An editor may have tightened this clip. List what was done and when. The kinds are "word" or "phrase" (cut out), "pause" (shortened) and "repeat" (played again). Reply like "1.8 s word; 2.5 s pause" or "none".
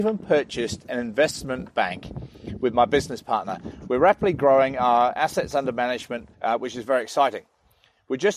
6.3 s pause

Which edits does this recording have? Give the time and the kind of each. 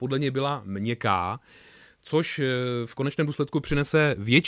none

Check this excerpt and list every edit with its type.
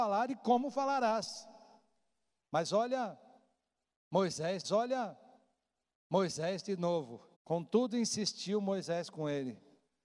4.6 s repeat; 7.3 s pause

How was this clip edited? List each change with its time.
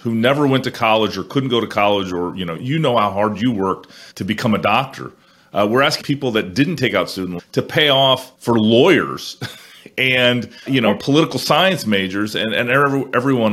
2.6 s word; 4.1 s pause; 6.0 s phrase; 7.4 s word; 8.3 s pause; 10.7 s word

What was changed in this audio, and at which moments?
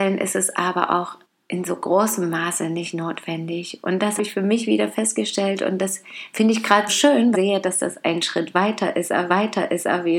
1.2 s pause; 4.2 s word; 6.9 s word; 7.3 s phrase; 9.3 s repeat

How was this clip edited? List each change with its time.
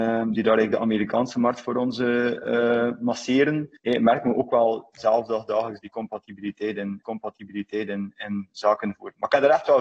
3.8 s pause; 7.0 s repeat

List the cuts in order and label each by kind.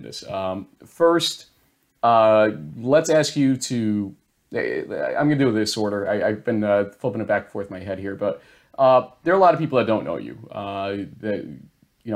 none

